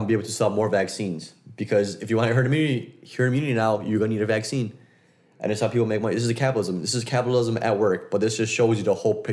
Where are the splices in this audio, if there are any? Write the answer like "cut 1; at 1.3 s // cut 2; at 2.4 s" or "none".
none